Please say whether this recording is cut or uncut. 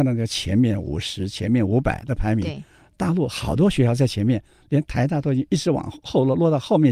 uncut